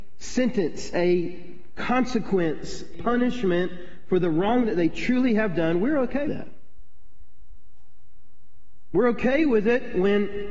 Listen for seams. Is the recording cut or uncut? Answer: cut